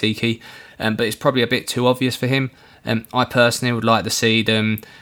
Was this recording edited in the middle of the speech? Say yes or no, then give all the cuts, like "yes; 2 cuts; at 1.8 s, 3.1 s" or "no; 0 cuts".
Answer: no; 0 cuts